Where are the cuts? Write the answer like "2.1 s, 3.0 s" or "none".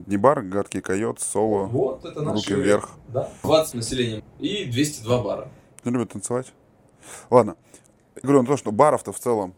2.0 s, 3.7 s, 4.2 s, 5.8 s, 8.2 s